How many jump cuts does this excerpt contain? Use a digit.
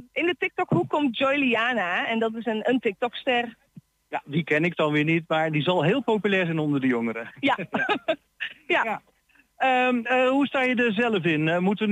0